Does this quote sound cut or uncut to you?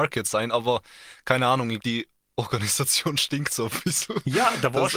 cut